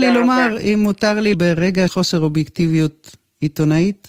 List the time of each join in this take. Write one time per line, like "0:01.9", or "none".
0:01.3
0:01.9